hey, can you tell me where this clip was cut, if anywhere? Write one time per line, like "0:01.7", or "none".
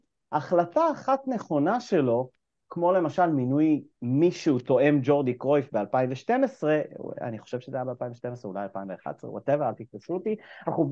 none